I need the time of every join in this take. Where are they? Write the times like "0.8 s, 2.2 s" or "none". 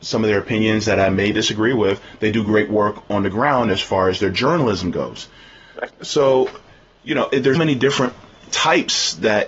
5.9 s, 7.5 s